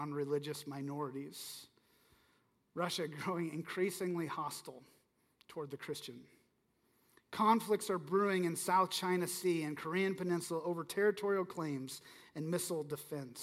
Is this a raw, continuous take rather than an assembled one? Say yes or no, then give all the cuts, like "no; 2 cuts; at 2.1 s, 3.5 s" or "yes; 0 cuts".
yes; 0 cuts